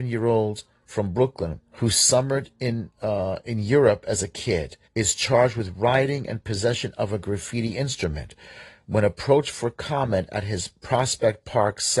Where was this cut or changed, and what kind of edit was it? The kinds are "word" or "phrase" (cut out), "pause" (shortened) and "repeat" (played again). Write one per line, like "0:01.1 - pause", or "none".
0:01.7 - pause
0:04.9 - pause